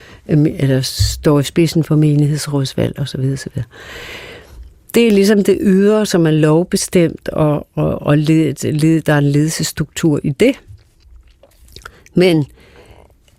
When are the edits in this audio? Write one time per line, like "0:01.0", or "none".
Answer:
none